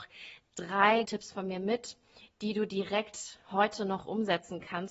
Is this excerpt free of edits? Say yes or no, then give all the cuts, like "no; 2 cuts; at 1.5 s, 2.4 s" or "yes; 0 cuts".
no; 1 cut; at 1.0 s